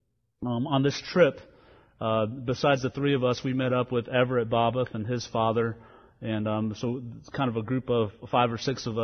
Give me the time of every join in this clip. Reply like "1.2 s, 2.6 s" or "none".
none